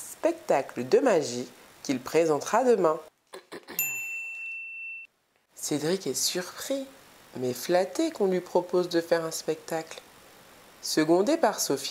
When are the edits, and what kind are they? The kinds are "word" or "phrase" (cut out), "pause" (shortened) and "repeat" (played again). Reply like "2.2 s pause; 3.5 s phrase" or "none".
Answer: none